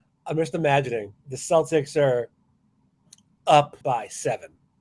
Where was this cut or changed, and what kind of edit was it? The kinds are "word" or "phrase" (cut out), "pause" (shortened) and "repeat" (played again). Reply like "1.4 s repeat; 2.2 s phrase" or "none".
1.2 s pause; 3.8 s pause